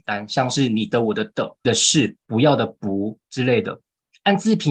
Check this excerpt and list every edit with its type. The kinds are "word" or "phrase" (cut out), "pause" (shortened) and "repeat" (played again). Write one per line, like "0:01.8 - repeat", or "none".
0:01.6 - phrase
0:02.2 - pause